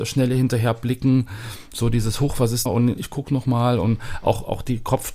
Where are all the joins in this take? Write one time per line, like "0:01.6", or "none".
0:02.7
0:03.0